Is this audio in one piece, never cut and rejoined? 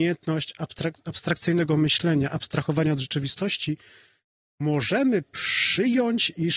yes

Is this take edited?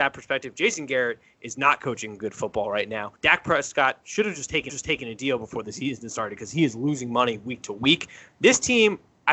yes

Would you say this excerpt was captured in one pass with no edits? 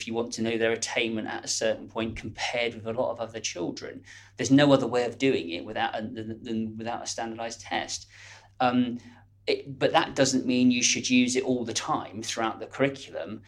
yes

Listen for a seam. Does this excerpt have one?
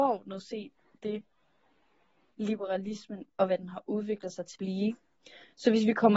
yes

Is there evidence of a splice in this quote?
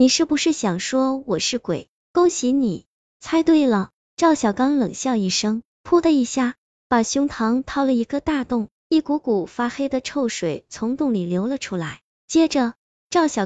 no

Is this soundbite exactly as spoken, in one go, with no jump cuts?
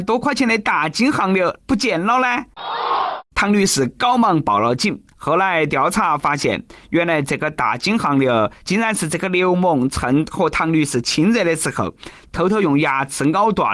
no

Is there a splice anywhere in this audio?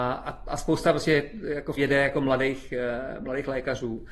yes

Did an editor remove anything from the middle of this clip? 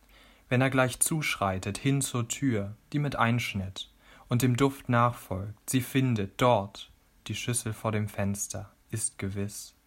no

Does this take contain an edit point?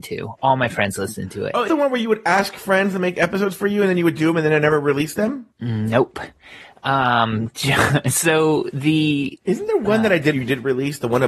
yes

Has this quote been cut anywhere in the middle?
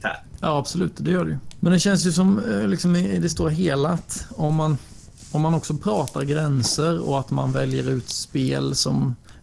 no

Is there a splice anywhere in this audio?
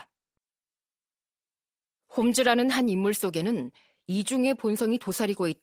no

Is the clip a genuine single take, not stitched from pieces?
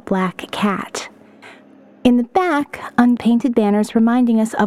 no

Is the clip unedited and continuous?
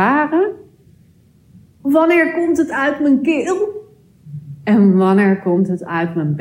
yes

